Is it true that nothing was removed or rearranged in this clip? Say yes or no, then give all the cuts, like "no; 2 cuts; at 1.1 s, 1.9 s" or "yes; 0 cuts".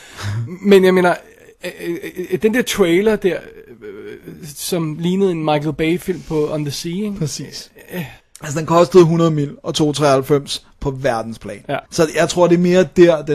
no; 2 cuts; at 8.2 s, 11.9 s